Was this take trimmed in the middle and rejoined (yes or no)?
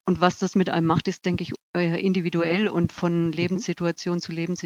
no